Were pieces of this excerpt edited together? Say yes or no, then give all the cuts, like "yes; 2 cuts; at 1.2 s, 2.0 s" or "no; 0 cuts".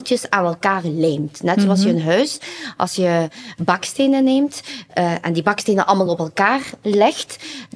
no; 0 cuts